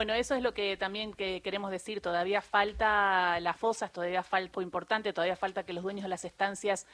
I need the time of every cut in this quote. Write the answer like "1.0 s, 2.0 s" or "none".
4.5 s